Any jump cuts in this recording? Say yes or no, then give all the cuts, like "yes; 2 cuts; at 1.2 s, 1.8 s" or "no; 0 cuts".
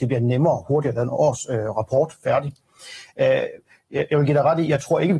no; 0 cuts